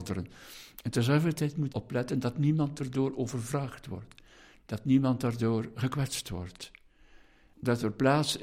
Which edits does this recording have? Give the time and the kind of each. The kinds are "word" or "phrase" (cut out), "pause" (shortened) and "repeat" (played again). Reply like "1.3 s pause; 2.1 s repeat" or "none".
1.7 s word